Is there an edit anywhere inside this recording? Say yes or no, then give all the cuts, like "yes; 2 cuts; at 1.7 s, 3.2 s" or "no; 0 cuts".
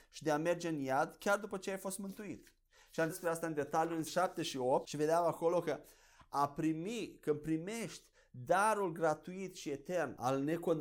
yes; 2 cuts; at 3.1 s, 4.1 s